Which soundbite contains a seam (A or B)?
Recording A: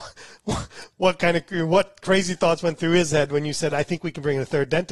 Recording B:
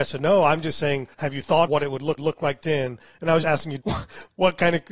B